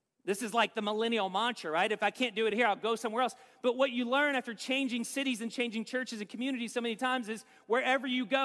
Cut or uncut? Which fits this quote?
uncut